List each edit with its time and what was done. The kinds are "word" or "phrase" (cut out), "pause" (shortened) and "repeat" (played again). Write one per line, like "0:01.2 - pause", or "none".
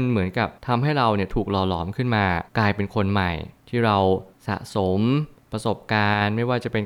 0:02.5 - pause